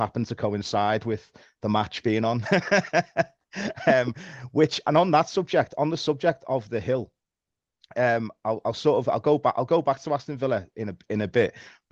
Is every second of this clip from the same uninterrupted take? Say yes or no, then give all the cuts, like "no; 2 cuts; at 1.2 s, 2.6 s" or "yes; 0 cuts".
yes; 0 cuts